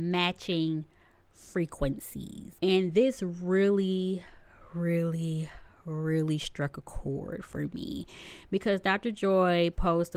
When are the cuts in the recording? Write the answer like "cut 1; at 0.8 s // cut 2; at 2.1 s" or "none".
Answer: cut 1; at 2.6 s